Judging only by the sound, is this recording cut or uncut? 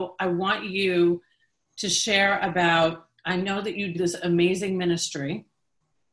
cut